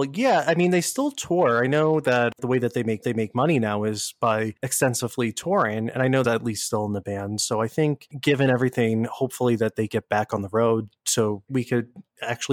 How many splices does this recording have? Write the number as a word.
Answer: two